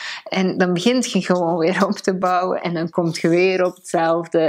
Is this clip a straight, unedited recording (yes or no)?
yes